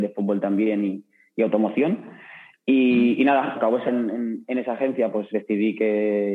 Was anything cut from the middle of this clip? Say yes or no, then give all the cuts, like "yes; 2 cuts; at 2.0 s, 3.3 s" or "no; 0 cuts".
yes; 3 cuts; at 3.5 s, 3.9 s, 5.3 s